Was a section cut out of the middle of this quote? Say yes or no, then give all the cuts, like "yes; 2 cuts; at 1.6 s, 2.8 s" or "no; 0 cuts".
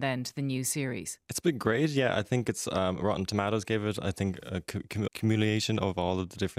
yes; 1 cut; at 5.1 s